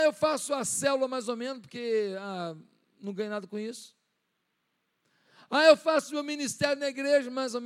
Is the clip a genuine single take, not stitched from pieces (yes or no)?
yes